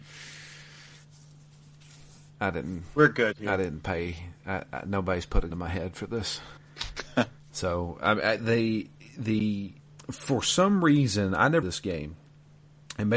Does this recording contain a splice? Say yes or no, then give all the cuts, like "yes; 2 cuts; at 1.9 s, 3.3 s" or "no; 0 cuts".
yes; 5 cuts; at 5.5 s, 6.6 s, 8.4 s, 9.8 s, 11.6 s